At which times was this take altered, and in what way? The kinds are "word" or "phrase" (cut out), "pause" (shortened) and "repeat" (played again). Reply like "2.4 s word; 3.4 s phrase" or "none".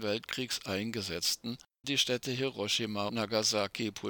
1.8 s word; 3.1 s word